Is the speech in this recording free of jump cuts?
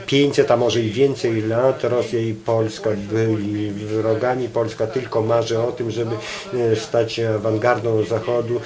yes; 0 cuts

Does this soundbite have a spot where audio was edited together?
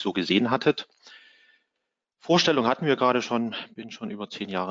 no; 0 cuts

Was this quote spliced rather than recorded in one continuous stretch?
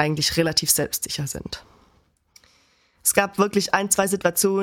no; 0 cuts

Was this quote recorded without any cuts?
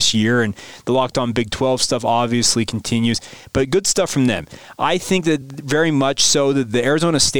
yes; 0 cuts

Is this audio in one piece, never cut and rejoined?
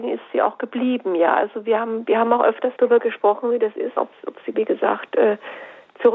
no; 3 cuts; at 2.8 s, 4.0 s, 4.5 s

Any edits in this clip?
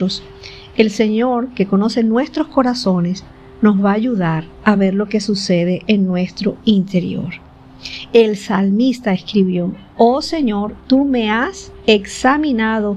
no; 0 cuts

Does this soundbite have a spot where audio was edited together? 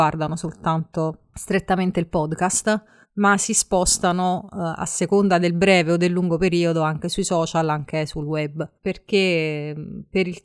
yes; 2 cuts; at 3.0 s, 8.8 s

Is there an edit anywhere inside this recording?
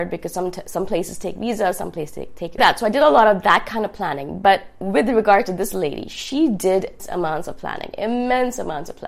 yes; 2 cuts; at 2.6 s, 7.0 s

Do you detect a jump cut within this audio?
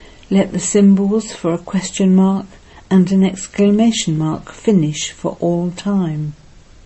no; 0 cuts

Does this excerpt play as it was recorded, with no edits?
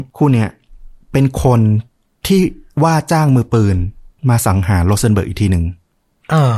yes; 0 cuts

